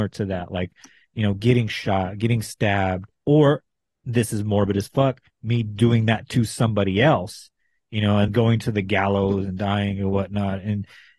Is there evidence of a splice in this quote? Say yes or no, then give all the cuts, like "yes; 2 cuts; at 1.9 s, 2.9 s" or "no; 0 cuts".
yes; 2 cuts; at 3.1 s, 8.3 s